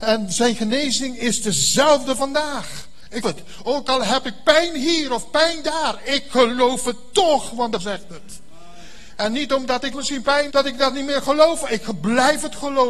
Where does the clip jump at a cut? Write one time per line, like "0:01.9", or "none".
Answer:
0:03.2
0:07.8
0:09.9
0:10.5